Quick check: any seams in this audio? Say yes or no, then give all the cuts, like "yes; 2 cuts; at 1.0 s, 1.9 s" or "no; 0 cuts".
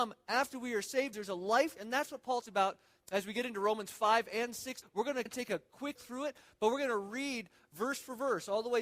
yes; 7 cuts; at 1.1 s, 1.8 s, 2.4 s, 3.0 s, 4.8 s, 5.3 s, 6.0 s